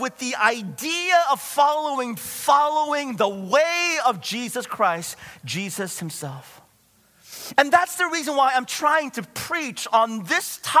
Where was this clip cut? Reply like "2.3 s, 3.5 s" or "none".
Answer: 2.2 s